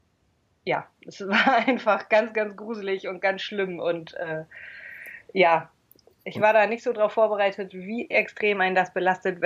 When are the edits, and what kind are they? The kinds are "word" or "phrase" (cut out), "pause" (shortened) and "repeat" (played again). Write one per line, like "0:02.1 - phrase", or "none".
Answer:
none

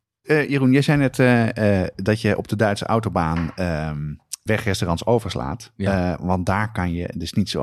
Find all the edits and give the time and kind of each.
0:04.5 - word

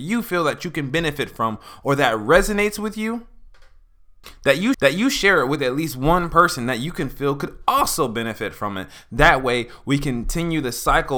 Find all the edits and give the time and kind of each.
0:04.7 - repeat

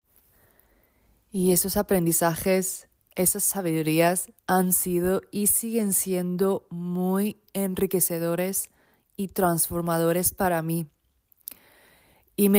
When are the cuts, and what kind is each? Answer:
0:04.4 - pause

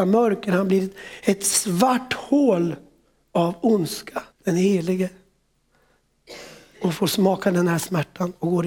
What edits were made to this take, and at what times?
0:04.3 - pause

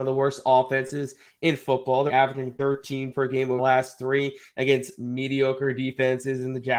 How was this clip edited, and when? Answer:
0:02.1 - word
0:03.1 - word
0:03.6 - word

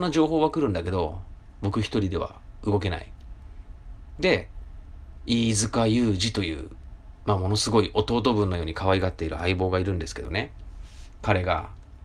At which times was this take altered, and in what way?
none

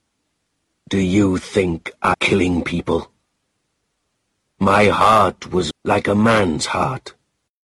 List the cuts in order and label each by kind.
0:02.1 - word
0:05.7 - phrase

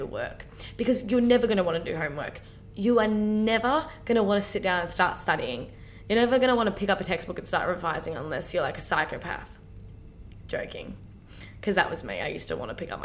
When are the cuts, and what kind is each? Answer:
none

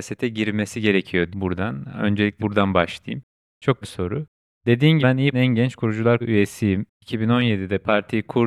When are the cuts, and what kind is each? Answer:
0:01.3 - word
0:02.4 - word
0:03.8 - word
0:05.0 - word
0:05.3 - word
0:06.2 - word

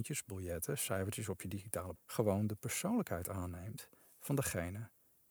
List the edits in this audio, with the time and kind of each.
0:02.0 - word

